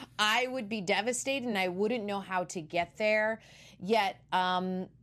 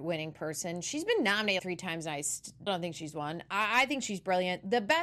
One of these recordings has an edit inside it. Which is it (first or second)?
second